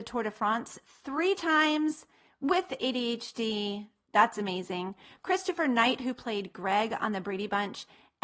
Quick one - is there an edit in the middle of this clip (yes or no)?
no